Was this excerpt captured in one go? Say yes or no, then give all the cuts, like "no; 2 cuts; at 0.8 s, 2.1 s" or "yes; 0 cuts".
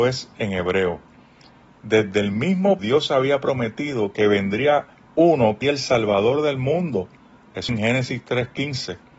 no; 3 cuts; at 2.8 s, 5.6 s, 7.7 s